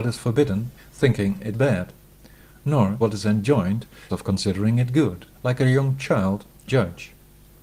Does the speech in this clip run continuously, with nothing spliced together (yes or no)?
no